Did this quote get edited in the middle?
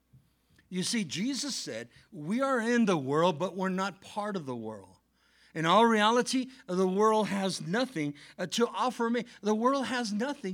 no; 0 cuts

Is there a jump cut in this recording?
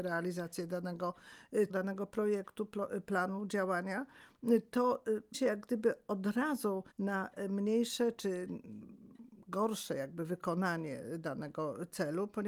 yes; 3 cuts; at 1.7 s, 5.3 s, 6.9 s

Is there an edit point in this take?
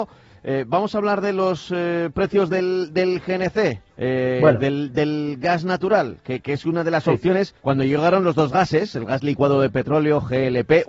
yes; 2 cuts; at 3.9 s, 7.6 s

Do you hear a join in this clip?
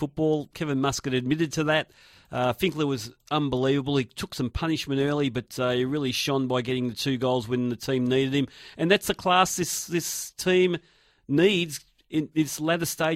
no; 0 cuts

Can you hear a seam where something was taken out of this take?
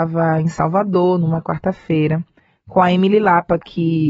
no; 0 cuts

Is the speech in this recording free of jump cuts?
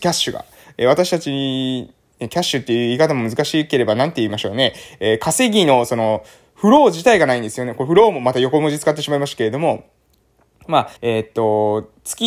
no; 1 cut; at 11.0 s

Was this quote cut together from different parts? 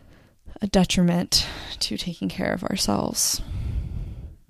no; 0 cuts

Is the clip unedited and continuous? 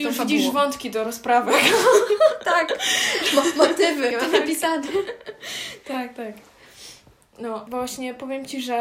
no; 2 cuts; at 4.1 s, 7.7 s

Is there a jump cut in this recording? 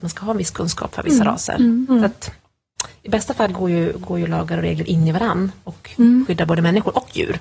no; 0 cuts

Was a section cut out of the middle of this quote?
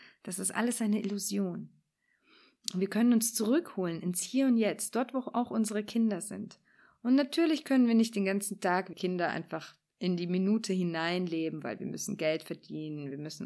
yes; 1 cut; at 8.9 s

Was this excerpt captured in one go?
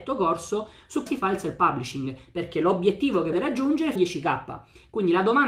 no; 3 cuts; at 1.1 s, 3.3 s, 4.0 s

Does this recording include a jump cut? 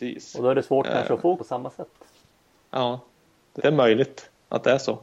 yes; 2 cuts; at 1.4 s, 3.6 s

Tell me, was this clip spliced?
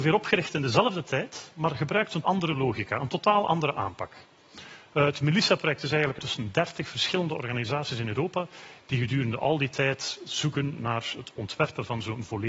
yes; 2 cuts; at 2.2 s, 6.2 s

